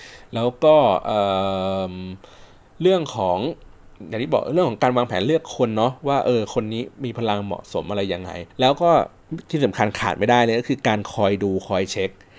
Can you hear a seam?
yes; 1 cut; at 8.5 s

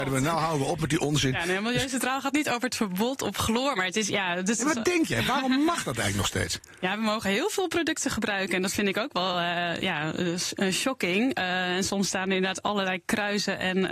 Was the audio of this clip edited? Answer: no; 0 cuts

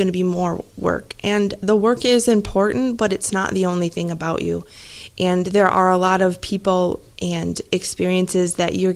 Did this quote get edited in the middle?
no; 0 cuts

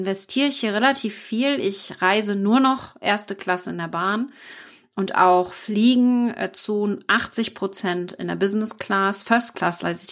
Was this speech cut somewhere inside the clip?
no; 0 cuts

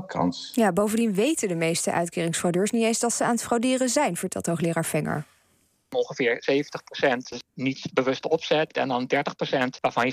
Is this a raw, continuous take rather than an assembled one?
yes; 0 cuts

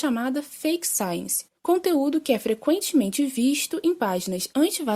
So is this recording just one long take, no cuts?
yes; 0 cuts

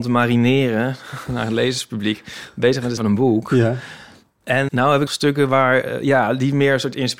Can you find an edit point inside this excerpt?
yes; 3 cuts; at 3.0 s, 4.7 s, 5.1 s

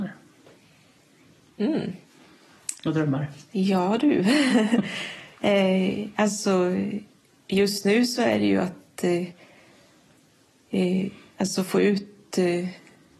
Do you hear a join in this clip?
no; 0 cuts

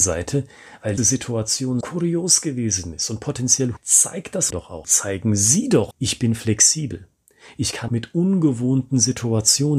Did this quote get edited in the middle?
yes; 7 cuts; at 1.0 s, 1.8 s, 3.8 s, 4.5 s, 4.8 s, 5.9 s, 7.9 s

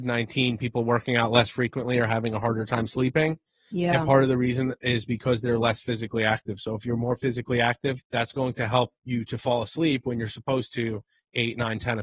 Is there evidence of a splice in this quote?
yes; 2 cuts; at 8.0 s, 9.0 s

